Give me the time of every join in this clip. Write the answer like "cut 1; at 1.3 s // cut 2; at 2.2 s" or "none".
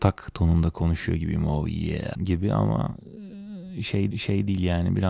cut 1; at 2.1 s // cut 2; at 4.1 s